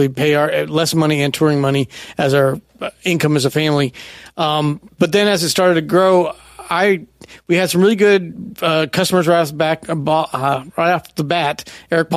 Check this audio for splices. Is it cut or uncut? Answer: uncut